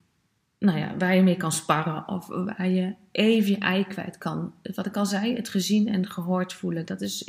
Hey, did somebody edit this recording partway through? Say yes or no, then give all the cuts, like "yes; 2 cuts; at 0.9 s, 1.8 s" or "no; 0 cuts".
no; 0 cuts